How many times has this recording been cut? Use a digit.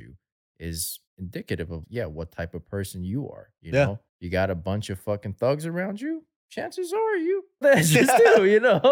5